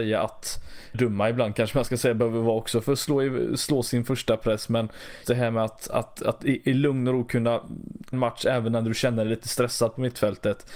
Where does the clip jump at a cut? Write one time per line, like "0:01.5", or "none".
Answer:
0:00.9
0:05.2
0:08.1